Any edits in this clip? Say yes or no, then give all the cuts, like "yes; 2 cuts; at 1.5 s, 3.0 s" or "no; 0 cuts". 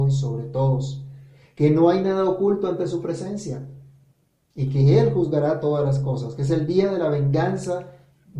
no; 0 cuts